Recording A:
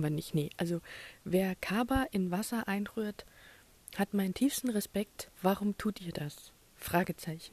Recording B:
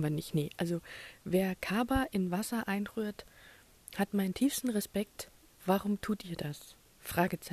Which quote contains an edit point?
A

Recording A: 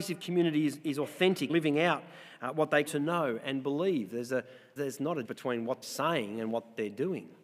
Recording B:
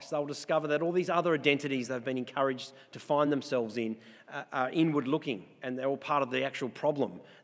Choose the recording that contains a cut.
A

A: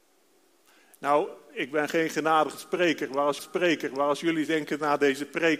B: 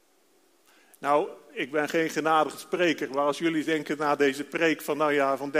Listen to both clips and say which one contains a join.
A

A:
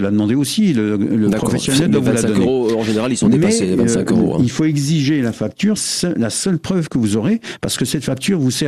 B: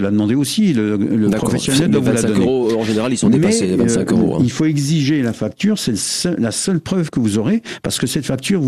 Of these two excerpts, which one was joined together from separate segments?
A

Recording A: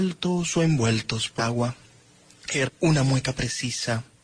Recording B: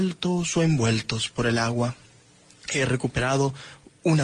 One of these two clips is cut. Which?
A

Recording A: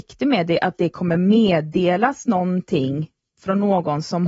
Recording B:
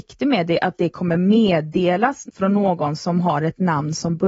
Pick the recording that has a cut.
B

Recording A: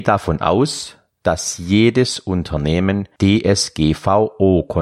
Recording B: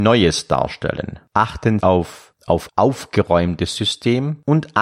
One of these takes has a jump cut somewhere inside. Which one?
B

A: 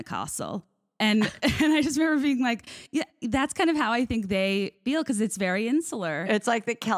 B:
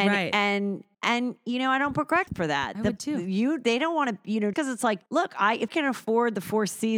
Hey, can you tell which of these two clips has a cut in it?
B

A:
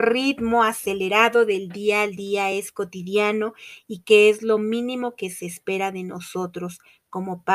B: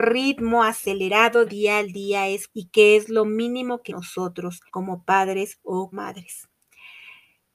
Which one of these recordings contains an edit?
B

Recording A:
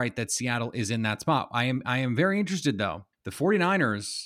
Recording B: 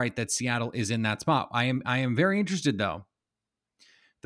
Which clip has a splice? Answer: A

